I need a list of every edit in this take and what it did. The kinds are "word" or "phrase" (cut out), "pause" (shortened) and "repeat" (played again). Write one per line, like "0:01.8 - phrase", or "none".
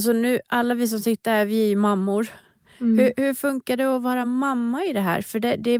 none